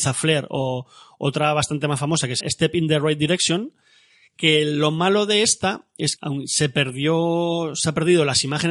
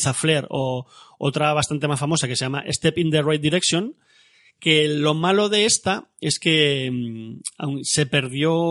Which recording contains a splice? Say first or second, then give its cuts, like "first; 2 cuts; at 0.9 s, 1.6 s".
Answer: first; 2 cuts; at 2.4 s, 6.2 s